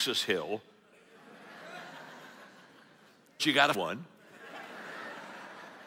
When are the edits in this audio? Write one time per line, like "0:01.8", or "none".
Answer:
0:03.4
0:03.7